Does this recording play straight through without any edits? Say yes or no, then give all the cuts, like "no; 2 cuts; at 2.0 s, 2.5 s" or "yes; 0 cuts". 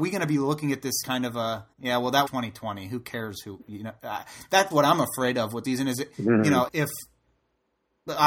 no; 7 cuts; at 1.0 s, 1.7 s, 2.3 s, 4.7 s, 5.6 s, 6.1 s, 6.7 s